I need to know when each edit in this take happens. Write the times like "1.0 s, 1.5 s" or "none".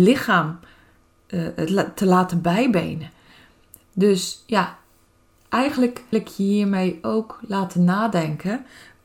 6.1 s